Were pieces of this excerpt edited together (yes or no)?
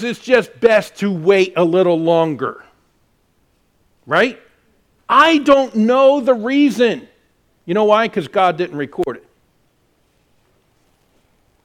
no